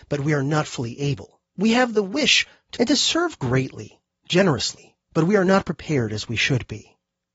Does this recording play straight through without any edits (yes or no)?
no